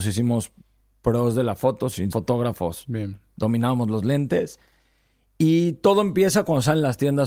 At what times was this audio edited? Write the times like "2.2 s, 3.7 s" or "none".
2.1 s